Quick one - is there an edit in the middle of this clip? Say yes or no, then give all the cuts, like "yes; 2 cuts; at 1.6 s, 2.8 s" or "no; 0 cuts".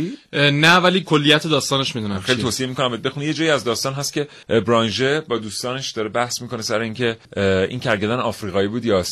yes; 2 cuts; at 4.4 s, 7.2 s